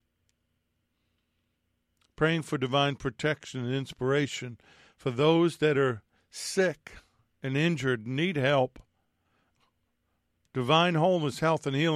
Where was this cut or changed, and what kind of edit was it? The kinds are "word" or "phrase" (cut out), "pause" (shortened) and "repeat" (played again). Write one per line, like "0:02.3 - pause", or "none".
none